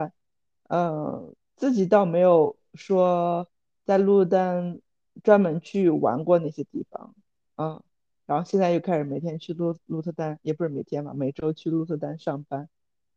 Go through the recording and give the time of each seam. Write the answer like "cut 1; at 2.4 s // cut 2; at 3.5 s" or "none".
none